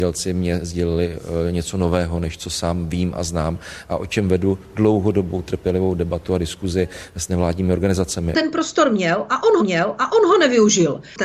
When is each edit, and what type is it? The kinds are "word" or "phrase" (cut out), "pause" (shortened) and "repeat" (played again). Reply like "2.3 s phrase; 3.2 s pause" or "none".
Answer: 9.6 s repeat